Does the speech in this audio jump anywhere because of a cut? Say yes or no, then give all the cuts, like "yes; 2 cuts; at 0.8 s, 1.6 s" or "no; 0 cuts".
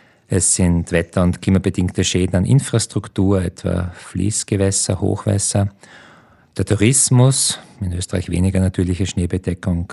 no; 0 cuts